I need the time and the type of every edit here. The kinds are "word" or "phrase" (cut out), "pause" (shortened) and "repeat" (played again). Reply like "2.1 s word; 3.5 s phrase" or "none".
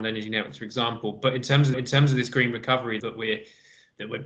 1.7 s repeat; 3.0 s word